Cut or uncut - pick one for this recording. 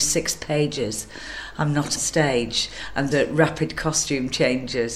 cut